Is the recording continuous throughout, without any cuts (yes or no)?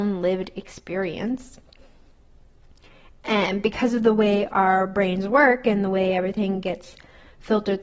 yes